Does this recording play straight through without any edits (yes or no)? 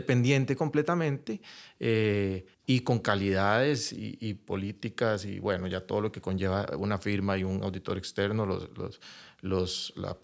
no